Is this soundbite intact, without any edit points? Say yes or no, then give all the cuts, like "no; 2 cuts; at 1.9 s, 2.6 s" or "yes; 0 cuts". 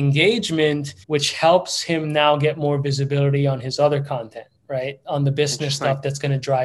no; 1 cut; at 1.0 s